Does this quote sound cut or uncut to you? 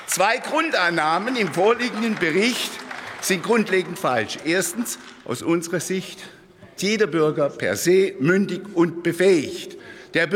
cut